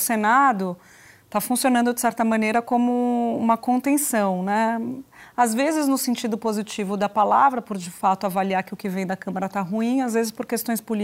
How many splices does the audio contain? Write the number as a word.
zero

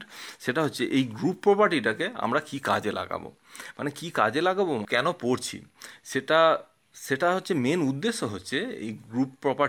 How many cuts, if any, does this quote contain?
one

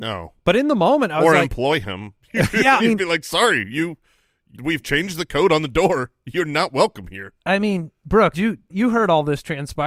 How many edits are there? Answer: four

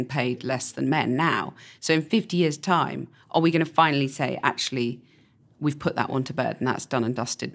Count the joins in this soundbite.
zero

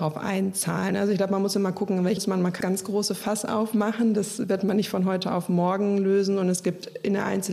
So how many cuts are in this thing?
two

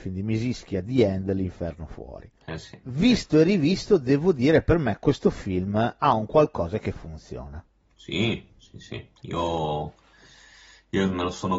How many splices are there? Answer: three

